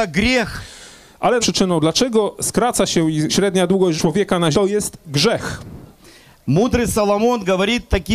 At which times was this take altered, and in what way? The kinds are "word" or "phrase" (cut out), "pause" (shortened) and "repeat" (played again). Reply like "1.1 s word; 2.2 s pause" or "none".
1.4 s word; 3.3 s word; 4.0 s word; 4.5 s word